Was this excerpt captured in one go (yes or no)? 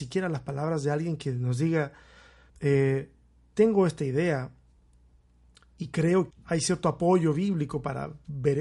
no